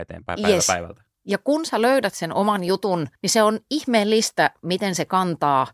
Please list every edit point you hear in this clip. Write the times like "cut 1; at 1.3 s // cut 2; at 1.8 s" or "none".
cut 1; at 3.2 s